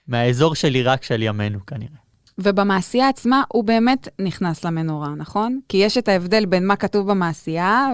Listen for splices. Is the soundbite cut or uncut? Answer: uncut